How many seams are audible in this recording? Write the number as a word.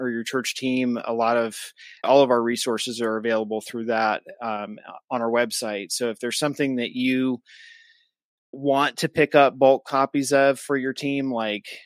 two